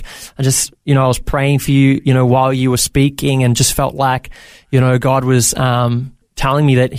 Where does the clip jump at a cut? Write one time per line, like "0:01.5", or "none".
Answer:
none